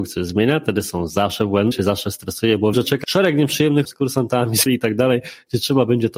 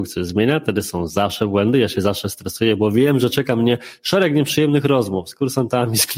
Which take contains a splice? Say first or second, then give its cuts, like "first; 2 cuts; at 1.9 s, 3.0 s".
first; 5 cuts; at 1.7 s, 2.7 s, 3.0 s, 3.8 s, 4.7 s